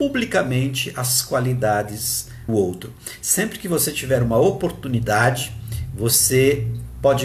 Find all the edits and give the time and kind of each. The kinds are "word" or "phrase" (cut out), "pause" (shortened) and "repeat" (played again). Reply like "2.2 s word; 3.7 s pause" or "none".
2.5 s word